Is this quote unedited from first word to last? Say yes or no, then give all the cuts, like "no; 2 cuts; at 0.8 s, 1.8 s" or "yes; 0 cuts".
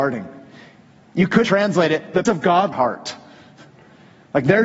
no; 3 cuts; at 1.4 s, 2.2 s, 2.7 s